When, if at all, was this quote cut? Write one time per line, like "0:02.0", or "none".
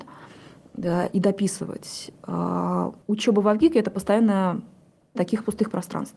0:03.0
0:05.2